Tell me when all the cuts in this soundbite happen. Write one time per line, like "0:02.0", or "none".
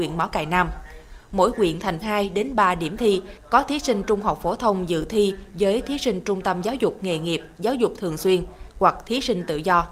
0:02.0